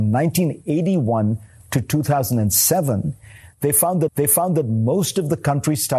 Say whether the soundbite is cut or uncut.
cut